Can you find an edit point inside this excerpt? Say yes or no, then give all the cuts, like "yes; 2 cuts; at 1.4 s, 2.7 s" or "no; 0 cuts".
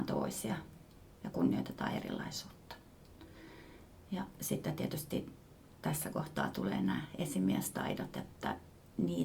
no; 0 cuts